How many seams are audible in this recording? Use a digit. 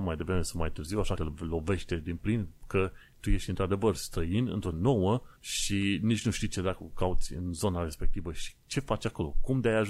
3